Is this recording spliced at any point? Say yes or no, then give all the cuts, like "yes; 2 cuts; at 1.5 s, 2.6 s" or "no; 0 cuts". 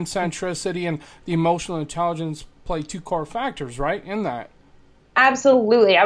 no; 0 cuts